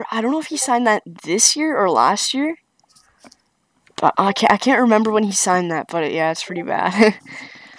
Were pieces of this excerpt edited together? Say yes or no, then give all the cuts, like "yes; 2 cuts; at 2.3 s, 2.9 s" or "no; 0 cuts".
no; 0 cuts